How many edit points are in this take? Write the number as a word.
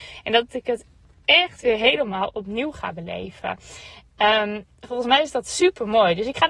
zero